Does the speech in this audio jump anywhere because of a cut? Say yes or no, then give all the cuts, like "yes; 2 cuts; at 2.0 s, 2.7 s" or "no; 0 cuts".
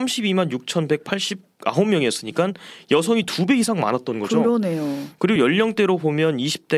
no; 0 cuts